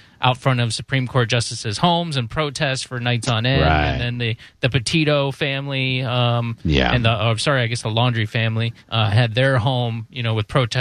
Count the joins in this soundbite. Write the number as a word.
one